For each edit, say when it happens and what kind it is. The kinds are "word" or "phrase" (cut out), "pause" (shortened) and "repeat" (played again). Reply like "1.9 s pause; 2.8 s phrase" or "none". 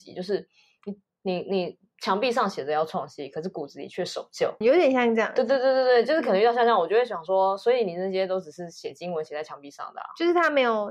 4.6 s word